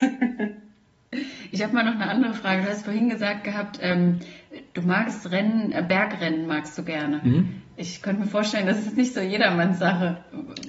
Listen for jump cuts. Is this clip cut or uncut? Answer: uncut